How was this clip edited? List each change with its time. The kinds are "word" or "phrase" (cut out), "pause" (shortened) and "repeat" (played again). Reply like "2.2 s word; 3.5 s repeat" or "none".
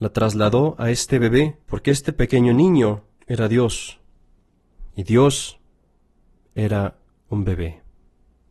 1.6 s pause; 3.1 s pause; 4.9 s pause